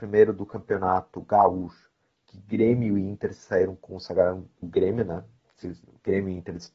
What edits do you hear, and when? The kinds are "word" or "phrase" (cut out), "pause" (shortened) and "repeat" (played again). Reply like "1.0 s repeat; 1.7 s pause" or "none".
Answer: 4.6 s word